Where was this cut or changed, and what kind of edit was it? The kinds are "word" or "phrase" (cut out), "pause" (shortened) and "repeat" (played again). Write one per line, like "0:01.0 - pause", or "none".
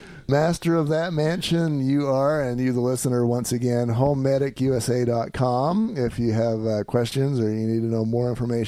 none